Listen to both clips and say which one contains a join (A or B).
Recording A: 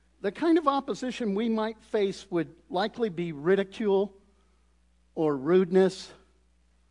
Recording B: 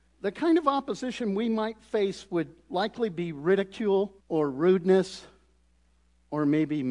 B